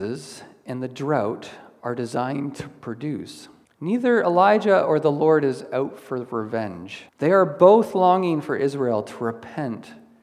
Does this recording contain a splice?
yes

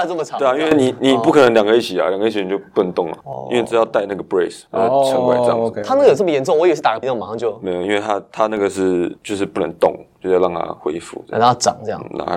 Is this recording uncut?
no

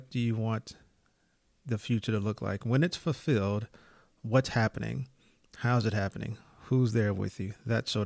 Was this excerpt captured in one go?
yes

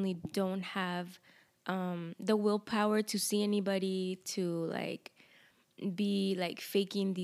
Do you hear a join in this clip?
no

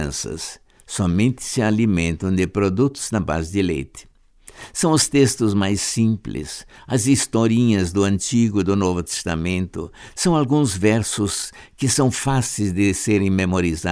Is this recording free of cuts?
yes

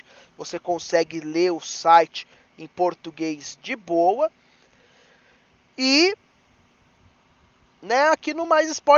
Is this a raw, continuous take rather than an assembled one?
yes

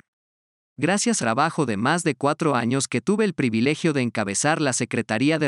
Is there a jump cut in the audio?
yes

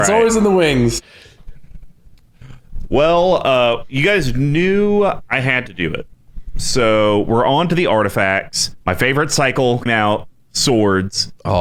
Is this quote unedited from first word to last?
no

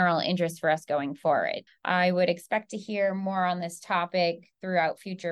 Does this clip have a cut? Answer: yes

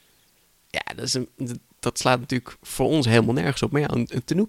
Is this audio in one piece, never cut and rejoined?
yes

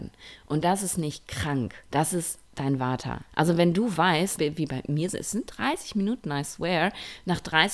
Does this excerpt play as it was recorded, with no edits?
no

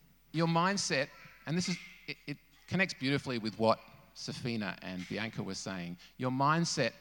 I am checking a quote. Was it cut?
no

